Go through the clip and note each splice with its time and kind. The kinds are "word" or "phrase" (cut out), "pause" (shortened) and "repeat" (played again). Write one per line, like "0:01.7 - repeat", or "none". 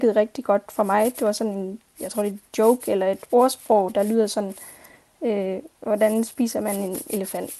none